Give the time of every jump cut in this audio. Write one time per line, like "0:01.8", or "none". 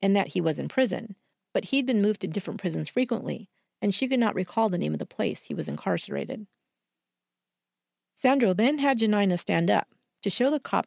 none